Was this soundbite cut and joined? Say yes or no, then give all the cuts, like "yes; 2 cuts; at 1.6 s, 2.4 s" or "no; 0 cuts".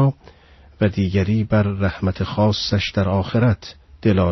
no; 0 cuts